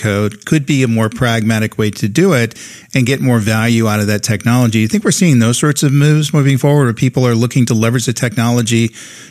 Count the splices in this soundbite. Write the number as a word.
zero